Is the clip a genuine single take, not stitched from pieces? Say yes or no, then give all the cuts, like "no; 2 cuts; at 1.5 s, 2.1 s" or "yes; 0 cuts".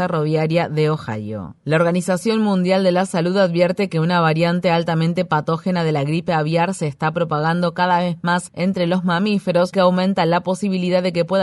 no; 1 cut; at 9.7 s